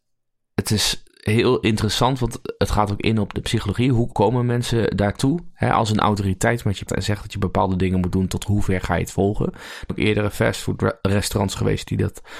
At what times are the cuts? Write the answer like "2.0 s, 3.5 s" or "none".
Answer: 1.1 s, 3.3 s, 4.1 s, 6.9 s, 9.9 s